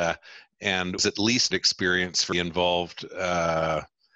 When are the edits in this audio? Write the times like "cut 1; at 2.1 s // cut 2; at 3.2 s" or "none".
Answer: cut 1; at 1.0 s // cut 2; at 1.5 s // cut 3; at 2.3 s